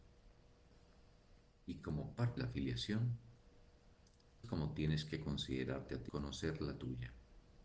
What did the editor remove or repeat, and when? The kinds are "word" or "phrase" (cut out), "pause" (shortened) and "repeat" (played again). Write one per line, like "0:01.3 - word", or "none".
0:01.5 - pause
0:02.4 - word
0:04.4 - phrase
0:06.1 - phrase